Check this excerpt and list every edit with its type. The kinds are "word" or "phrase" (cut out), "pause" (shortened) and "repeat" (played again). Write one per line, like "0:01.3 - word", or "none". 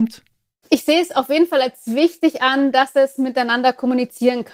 none